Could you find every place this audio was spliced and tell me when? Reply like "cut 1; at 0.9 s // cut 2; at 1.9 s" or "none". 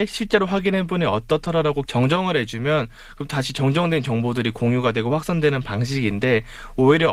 cut 1; at 1.9 s